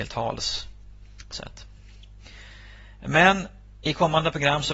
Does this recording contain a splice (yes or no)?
yes